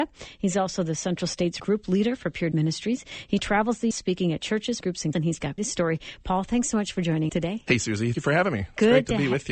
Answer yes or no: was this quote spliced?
yes